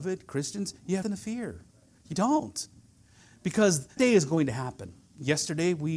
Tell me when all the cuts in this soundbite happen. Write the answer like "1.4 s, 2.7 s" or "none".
1.0 s, 2.1 s, 4.0 s

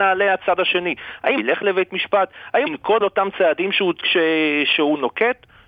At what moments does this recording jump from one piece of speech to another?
1.4 s, 2.7 s, 3.0 s, 4.0 s

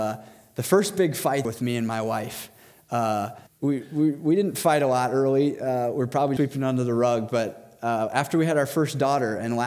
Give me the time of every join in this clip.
1.4 s, 3.5 s, 6.4 s

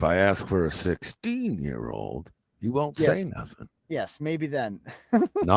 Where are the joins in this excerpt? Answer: none

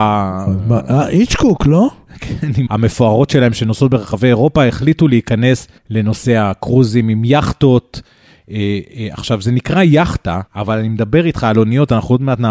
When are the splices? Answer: 2.7 s, 5.8 s, 10.5 s

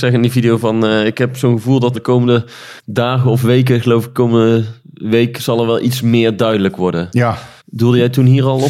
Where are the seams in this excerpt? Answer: 1.9 s, 2.8 s, 7.6 s

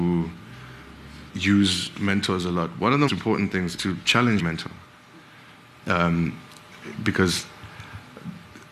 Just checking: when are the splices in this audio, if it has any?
1.3 s, 3.1 s, 3.8 s, 4.4 s

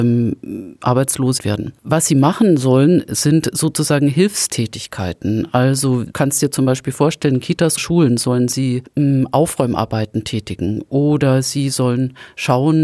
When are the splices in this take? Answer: 1.4 s, 6.1 s, 7.8 s

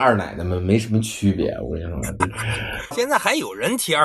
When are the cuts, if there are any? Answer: 2.2 s, 2.9 s

